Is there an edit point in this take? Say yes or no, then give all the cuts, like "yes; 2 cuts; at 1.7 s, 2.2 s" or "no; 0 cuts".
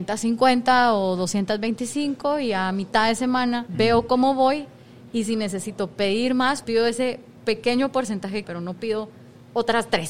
yes; 4 cuts; at 3.7 s, 6.6 s, 7.4 s, 8.4 s